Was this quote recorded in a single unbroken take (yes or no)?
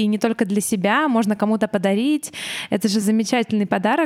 yes